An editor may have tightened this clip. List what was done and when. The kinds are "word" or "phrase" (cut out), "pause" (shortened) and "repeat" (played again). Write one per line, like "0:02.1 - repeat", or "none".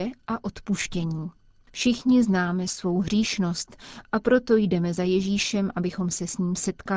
none